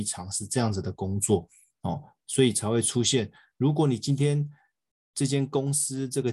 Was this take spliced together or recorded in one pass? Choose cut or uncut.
uncut